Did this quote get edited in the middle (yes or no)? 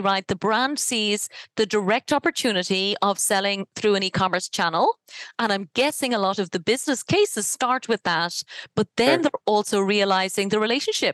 no